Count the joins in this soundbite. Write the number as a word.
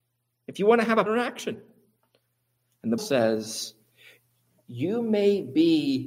two